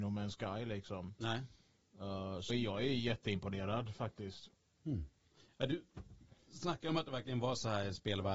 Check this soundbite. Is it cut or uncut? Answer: cut